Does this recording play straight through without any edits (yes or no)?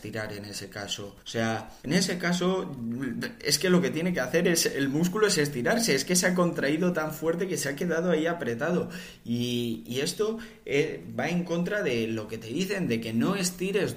no